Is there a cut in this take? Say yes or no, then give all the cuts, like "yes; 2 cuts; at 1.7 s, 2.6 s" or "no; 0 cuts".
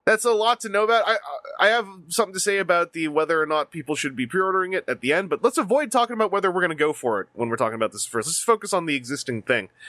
yes; 1 cut; at 5.4 s